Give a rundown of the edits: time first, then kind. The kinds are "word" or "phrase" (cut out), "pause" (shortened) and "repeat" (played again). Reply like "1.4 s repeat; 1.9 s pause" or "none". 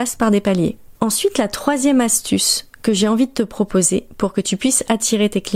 0.9 s pause